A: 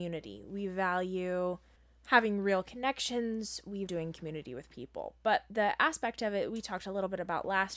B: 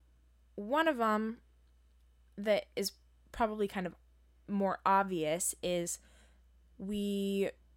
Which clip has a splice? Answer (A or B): A